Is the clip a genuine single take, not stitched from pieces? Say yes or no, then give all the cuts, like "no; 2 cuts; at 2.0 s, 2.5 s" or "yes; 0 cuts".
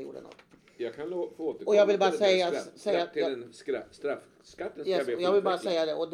yes; 0 cuts